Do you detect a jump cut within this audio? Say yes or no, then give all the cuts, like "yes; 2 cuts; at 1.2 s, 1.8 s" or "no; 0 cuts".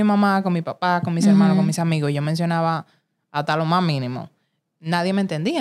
no; 0 cuts